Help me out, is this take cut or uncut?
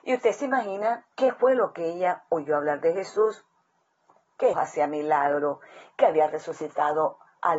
cut